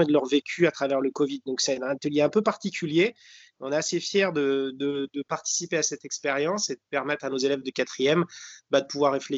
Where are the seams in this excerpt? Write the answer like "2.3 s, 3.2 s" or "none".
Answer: none